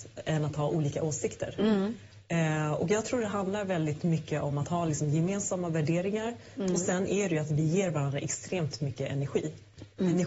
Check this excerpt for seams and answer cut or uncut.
uncut